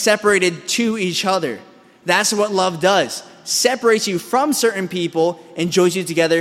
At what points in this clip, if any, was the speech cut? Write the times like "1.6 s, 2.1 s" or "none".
none